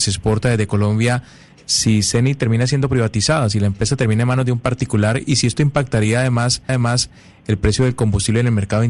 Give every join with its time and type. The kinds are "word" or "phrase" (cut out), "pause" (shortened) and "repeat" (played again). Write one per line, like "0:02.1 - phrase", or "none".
0:06.7 - repeat